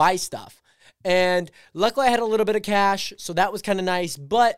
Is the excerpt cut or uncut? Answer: uncut